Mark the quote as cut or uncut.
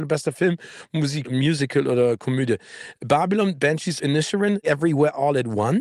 cut